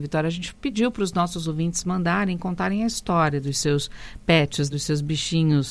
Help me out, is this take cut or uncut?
cut